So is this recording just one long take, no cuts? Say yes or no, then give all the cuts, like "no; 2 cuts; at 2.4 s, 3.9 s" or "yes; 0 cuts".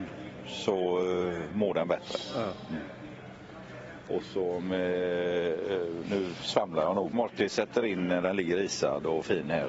no; 1 cut; at 7.1 s